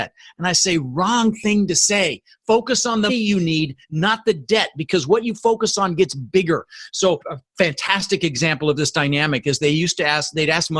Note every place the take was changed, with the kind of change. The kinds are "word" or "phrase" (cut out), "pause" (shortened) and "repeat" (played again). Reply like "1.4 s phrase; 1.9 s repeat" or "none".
3.1 s word